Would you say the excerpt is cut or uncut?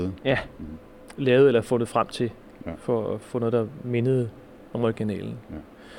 uncut